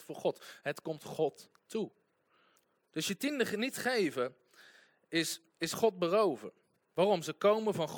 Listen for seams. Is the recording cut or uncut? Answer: cut